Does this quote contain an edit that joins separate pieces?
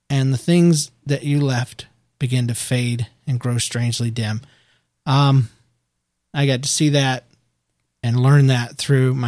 no; 0 cuts

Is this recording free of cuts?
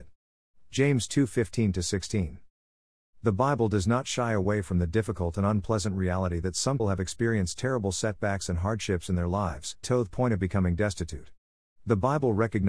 no; 2 cuts; at 6.8 s, 9.8 s

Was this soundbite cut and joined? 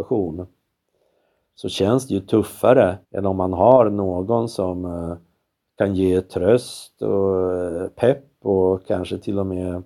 yes; 1 cut; at 3.0 s

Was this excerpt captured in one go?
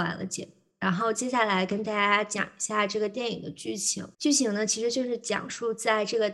no; 1 cut; at 4.1 s

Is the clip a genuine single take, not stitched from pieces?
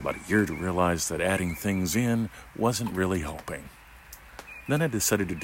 yes; 0 cuts

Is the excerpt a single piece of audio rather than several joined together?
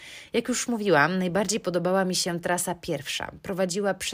yes; 0 cuts

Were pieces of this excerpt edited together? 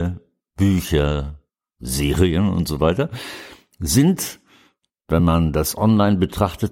no; 0 cuts

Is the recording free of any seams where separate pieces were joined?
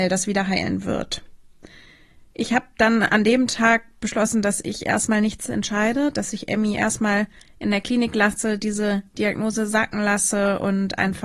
yes; 0 cuts

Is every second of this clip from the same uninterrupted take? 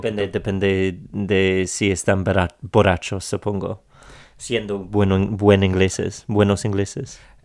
yes; 0 cuts

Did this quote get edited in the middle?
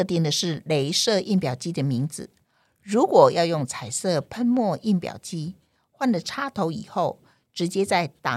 no; 0 cuts

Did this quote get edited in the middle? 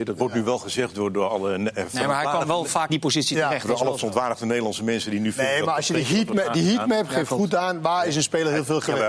yes; 1 cut; at 2.9 s

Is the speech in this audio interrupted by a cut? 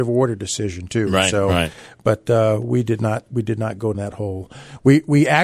yes; 1 cut; at 3.9 s

